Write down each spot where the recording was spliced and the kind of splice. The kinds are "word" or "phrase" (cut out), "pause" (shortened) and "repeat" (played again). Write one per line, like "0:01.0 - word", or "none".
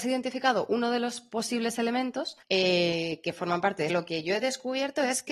0:02.4 - pause
0:03.9 - phrase